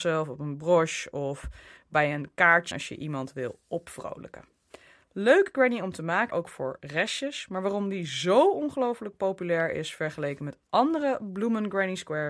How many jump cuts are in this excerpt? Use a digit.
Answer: 2